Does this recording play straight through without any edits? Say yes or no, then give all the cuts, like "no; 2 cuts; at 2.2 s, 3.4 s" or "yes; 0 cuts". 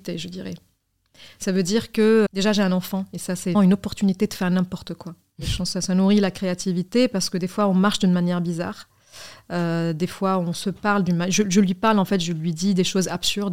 no; 2 cuts; at 2.3 s, 3.5 s